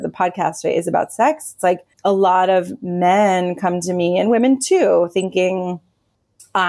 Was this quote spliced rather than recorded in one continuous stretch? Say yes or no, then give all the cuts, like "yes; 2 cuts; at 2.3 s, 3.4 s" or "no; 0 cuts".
yes; 1 cut; at 1.9 s